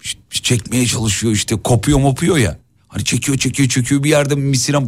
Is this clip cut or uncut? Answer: uncut